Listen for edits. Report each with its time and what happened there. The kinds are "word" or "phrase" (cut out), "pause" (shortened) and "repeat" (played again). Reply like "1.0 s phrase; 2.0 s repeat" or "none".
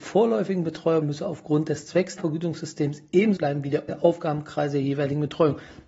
1.0 s phrase; 2.2 s phrase; 3.4 s word; 3.9 s word